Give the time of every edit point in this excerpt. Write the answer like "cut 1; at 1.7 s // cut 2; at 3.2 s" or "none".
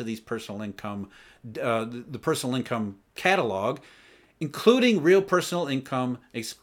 none